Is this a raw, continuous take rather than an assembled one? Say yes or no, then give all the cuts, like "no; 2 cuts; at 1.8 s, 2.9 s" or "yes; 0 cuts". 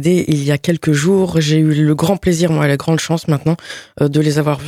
yes; 0 cuts